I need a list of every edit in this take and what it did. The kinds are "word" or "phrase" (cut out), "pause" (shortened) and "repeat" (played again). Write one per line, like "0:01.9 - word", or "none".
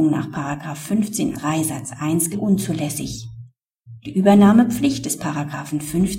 0:01.3 - word
0:02.3 - word